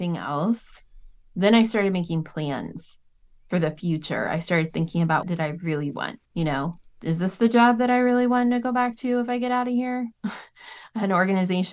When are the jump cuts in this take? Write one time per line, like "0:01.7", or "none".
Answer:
0:05.2
0:05.9
0:06.3